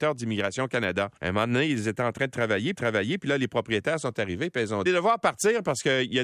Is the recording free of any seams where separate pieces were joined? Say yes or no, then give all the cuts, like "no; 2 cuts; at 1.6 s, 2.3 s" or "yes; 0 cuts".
no; 3 cuts; at 1.2 s, 2.8 s, 4.9 s